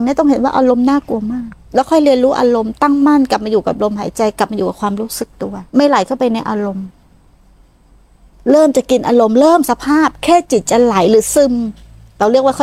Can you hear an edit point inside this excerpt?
yes; 2 cuts; at 1.6 s, 5.7 s

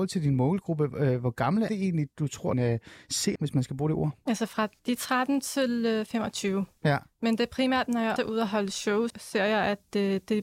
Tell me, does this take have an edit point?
yes; 6 cuts; at 1.7 s, 2.5 s, 3.4 s, 4.8 s, 8.2 s, 9.1 s

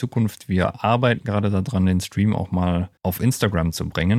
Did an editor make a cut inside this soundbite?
yes; 1 cut; at 3.0 s

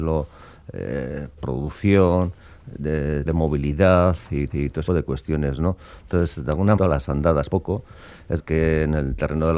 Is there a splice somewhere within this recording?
yes; 7 cuts; at 1.4 s, 3.2 s, 4.5 s, 4.9 s, 6.8 s, 7.5 s, 8.4 s

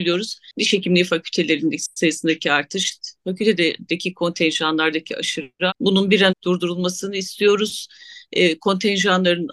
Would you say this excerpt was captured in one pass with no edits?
no; 3 cuts; at 3.2 s, 5.7 s, 6.3 s

